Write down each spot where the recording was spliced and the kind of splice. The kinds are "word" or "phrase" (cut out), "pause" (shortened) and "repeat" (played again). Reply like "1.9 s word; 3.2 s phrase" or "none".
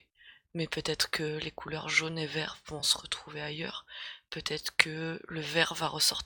none